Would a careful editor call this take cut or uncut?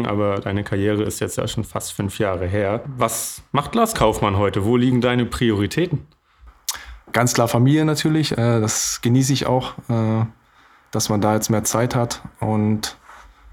uncut